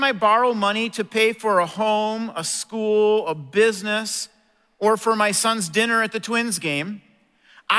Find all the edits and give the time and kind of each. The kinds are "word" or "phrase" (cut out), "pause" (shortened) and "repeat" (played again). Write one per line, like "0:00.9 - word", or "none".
none

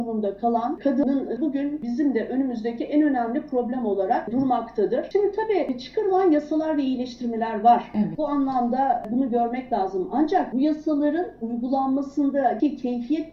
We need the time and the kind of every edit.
0:01.4 - word

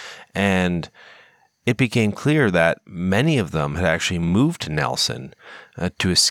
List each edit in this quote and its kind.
none

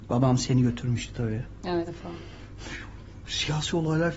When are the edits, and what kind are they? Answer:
0:01.9 - word

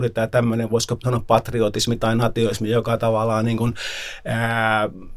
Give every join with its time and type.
none

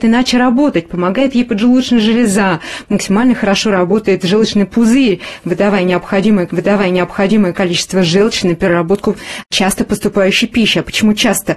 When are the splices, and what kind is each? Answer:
0:06.5 - repeat

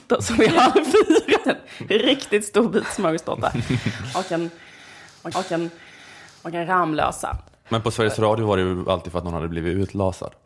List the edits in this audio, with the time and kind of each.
0:01.4 - word
0:05.3 - repeat

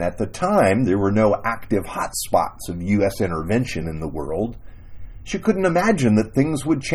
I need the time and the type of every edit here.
none

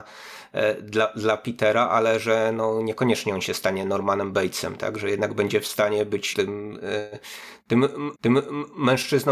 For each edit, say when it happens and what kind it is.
0:06.3 - word
0:08.2 - repeat

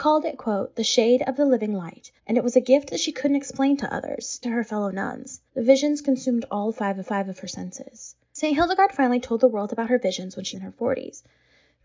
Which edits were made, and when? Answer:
0:02.2 - pause
0:04.4 - word
0:05.5 - pause
0:07.0 - repeat
0:10.5 - word

